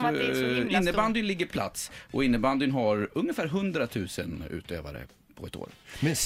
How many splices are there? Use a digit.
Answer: 1